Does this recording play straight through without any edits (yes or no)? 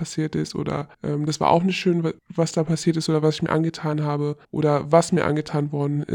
no